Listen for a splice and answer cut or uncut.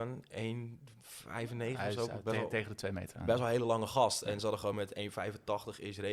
uncut